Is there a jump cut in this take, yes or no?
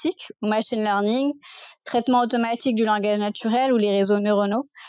no